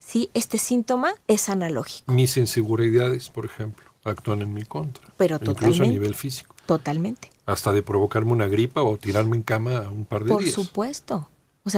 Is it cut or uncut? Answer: cut